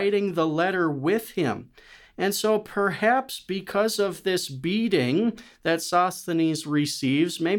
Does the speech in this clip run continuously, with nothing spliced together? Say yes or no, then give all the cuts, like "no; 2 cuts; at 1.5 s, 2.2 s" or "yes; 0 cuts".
yes; 0 cuts